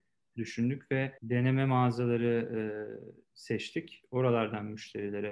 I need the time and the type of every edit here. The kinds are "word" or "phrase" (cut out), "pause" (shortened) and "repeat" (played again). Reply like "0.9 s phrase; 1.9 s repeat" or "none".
1.2 s pause